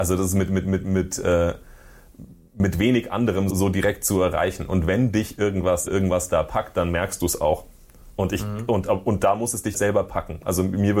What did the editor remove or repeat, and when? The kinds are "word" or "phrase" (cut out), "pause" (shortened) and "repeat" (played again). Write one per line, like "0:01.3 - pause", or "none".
0:03.5 - word
0:05.9 - word
0:09.7 - word